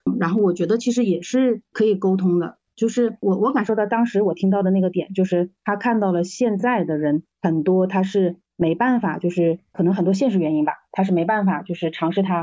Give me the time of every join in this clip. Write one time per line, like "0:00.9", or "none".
0:07.3
0:08.4